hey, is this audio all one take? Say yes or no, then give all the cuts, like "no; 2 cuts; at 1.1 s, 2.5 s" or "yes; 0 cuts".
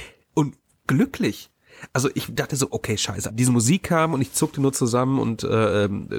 no; 1 cut; at 3.3 s